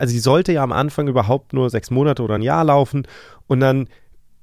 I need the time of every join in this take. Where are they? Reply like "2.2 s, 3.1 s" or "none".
none